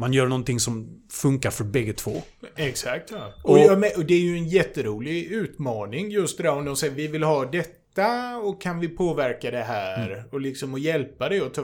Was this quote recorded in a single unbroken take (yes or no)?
yes